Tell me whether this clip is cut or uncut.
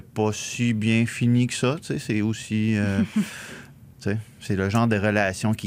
uncut